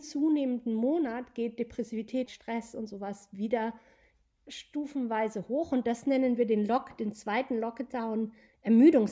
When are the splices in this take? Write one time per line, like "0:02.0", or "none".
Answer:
0:02.3
0:04.5